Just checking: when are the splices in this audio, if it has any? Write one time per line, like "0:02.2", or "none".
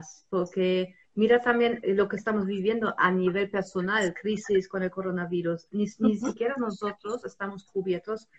0:01.0
0:04.1